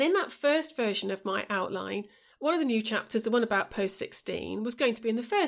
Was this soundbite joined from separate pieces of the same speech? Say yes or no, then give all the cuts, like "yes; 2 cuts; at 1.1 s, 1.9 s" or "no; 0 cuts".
no; 0 cuts